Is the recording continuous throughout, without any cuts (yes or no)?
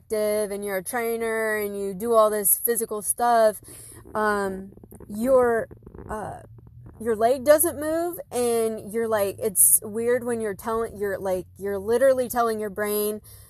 no